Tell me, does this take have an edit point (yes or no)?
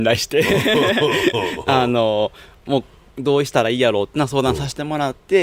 no